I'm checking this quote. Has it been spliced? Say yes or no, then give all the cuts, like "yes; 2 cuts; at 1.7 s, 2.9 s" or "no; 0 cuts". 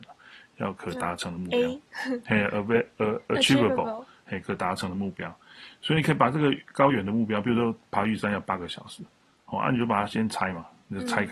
no; 0 cuts